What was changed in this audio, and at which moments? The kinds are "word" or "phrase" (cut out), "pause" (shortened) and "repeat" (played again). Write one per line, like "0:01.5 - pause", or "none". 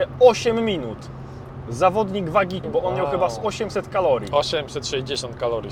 0:02.6 - word